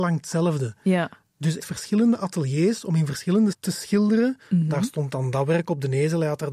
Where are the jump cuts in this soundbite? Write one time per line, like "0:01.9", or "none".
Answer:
0:01.6
0:03.5